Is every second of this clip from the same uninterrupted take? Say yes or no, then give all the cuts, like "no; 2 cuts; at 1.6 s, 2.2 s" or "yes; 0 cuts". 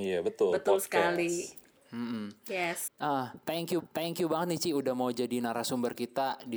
no; 2 cuts; at 2.9 s, 3.8 s